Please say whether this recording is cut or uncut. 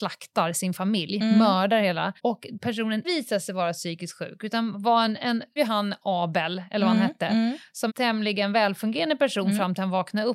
cut